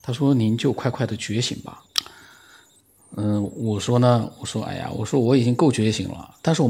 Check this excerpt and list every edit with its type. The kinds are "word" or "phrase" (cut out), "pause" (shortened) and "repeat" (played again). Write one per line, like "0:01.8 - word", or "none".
0:01.9 - pause